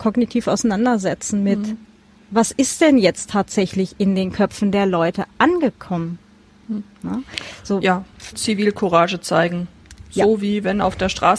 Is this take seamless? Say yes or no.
no